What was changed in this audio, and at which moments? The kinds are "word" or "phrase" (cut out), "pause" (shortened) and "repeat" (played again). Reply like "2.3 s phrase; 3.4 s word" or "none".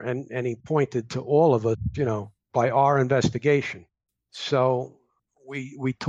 none